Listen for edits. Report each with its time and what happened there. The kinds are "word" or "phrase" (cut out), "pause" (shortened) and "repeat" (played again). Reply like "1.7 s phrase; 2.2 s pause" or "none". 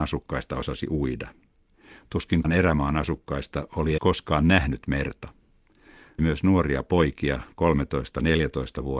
2.4 s word; 4.0 s word; 6.2 s word

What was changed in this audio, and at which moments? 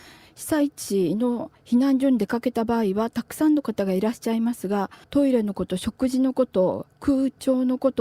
5.0 s pause

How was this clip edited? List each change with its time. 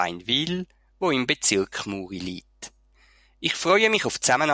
none

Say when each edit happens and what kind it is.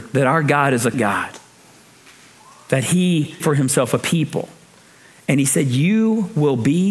0.9 s word; 3.4 s word

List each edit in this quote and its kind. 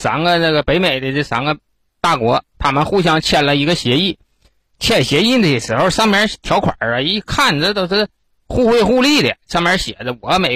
none

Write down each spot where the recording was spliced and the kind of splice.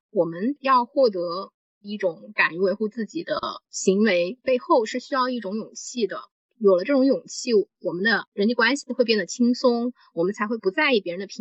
none

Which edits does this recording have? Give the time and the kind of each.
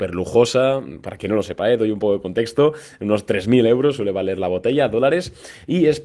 none

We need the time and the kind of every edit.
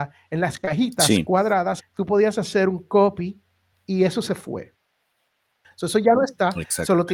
1.8 s word

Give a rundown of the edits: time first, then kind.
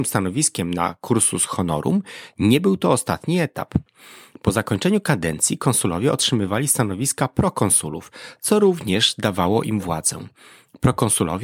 none

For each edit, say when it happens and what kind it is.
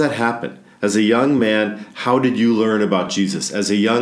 none

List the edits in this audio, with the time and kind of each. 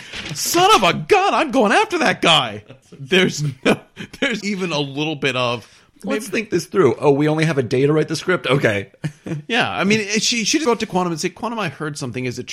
4.4 s word; 10.6 s word

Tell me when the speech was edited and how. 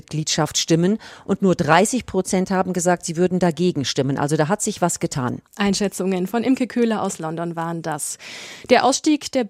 5.5 s pause

